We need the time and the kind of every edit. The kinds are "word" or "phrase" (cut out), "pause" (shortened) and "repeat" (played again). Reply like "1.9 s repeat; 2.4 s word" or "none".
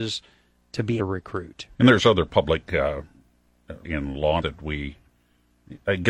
1.0 s phrase; 1.7 s pause; 3.8 s word; 4.4 s word